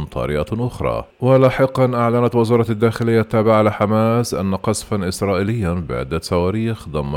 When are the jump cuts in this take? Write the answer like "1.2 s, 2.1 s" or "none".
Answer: 1.1 s